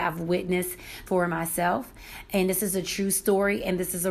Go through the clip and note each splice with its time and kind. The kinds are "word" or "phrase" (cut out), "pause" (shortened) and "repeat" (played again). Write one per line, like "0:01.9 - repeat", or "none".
0:01.1 - word